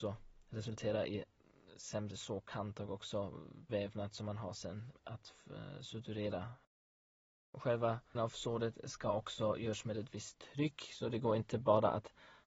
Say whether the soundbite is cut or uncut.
cut